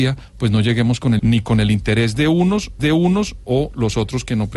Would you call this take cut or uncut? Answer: cut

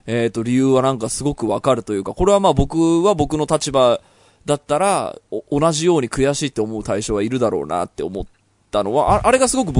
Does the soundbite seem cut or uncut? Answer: uncut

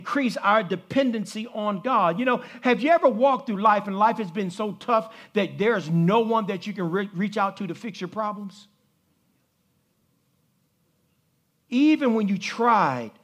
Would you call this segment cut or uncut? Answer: uncut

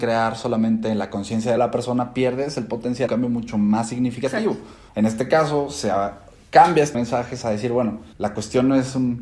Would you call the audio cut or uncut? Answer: cut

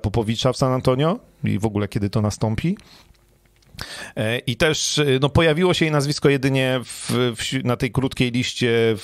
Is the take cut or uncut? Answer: uncut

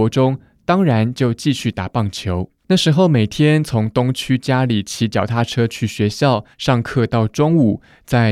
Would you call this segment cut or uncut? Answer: cut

